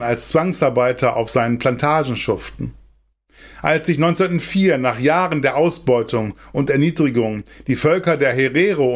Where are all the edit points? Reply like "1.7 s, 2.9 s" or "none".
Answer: none